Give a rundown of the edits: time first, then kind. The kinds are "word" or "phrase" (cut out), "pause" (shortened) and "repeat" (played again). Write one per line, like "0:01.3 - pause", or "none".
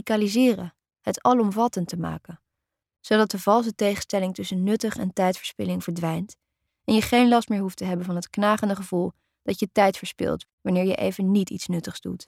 none